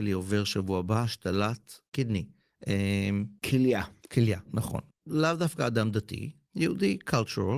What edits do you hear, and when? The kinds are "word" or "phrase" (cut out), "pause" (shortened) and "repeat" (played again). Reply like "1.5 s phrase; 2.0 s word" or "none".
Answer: 1.9 s pause